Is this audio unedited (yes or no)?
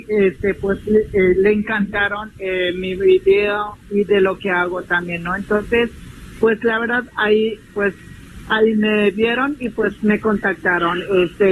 yes